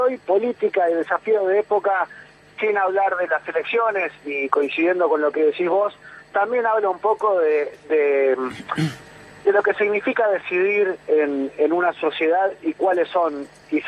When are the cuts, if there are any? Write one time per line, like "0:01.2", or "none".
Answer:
none